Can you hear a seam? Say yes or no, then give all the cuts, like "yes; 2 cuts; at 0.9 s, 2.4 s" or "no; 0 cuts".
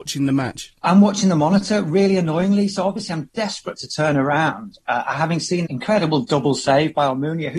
yes; 1 cut; at 5.6 s